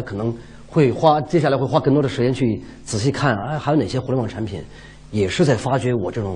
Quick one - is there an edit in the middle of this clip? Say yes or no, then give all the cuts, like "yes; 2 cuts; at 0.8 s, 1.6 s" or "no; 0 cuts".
no; 0 cuts